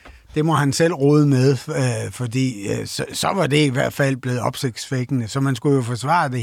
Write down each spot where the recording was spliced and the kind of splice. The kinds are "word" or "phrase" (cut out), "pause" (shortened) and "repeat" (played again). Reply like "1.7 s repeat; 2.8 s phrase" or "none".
none